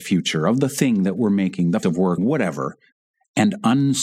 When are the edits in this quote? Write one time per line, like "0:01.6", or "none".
0:01.8
0:02.2